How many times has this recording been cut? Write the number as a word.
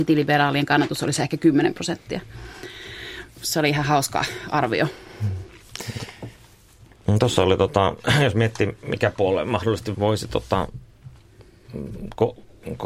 one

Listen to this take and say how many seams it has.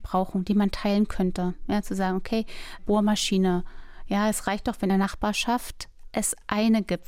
two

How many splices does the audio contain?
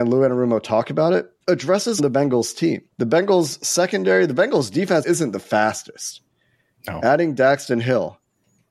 four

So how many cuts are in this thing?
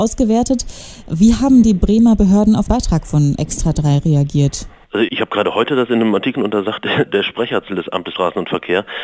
seven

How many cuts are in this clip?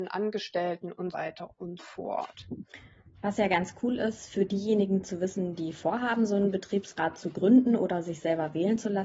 two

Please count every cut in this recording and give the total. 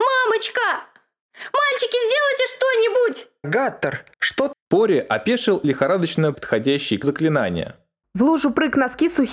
six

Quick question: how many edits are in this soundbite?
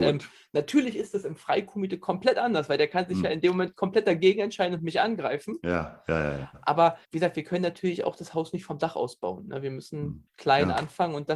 two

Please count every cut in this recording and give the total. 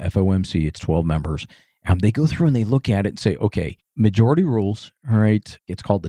zero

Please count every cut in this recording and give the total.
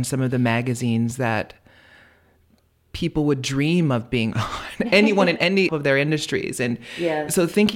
one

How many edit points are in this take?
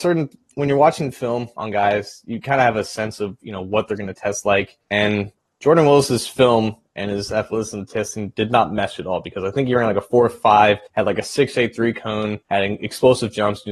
three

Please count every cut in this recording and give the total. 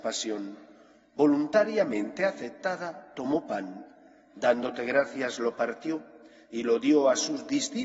zero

